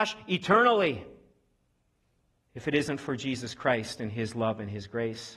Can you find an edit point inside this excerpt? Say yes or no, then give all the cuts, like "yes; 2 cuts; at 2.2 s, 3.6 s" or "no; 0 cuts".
no; 0 cuts